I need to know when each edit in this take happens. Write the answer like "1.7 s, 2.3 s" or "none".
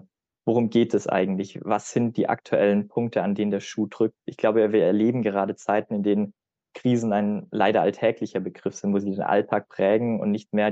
none